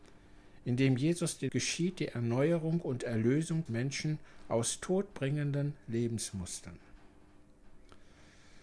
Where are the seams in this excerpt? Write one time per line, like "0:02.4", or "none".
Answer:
0:01.5
0:03.7